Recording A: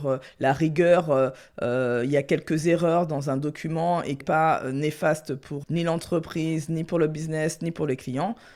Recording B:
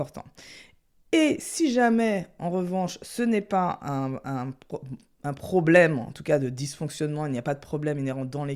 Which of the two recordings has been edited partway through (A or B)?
A